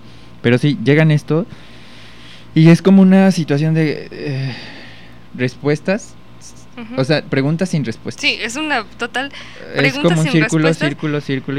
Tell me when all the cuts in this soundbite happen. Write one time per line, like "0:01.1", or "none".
none

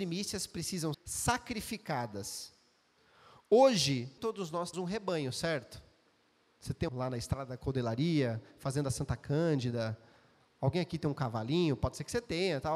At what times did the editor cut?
0:00.9
0:04.2
0:04.7
0:06.9

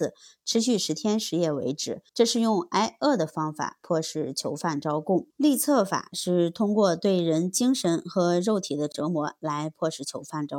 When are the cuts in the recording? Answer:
0:02.1
0:05.3

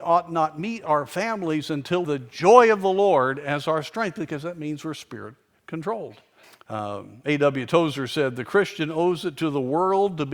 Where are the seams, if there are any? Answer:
0:02.0
0:06.4

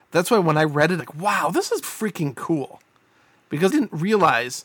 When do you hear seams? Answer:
0:01.0
0:01.8
0:03.7

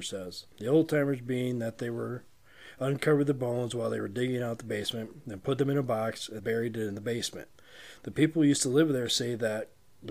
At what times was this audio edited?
0:06.4

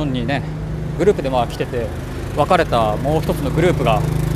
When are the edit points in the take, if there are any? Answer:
0:01.0

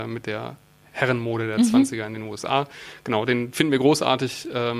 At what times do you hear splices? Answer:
none

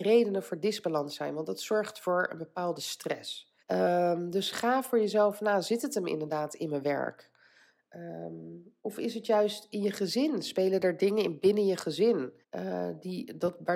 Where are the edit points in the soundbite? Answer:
0:03.6
0:08.8
0:12.4

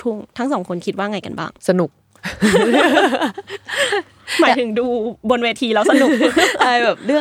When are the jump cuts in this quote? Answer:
0:01.6

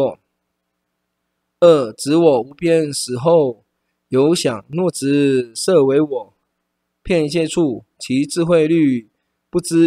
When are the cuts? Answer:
none

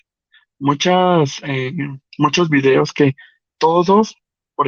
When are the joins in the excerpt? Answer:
none

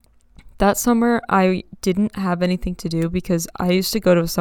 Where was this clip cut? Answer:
none

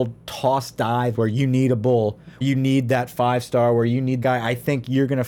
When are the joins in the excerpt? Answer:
0:01.1
0:02.4
0:04.2

